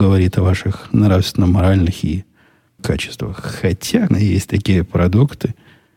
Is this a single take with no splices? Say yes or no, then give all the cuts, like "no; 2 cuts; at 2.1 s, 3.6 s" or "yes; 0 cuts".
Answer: no; 2 cuts; at 2.8 s, 4.1 s